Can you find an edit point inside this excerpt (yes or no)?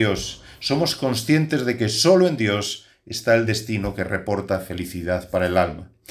no